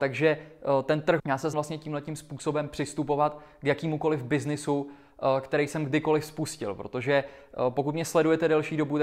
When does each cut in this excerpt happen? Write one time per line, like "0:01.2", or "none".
0:01.2
0:01.5